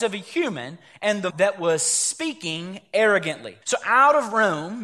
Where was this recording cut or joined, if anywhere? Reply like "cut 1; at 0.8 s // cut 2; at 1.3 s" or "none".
cut 1; at 1.3 s // cut 2; at 3.6 s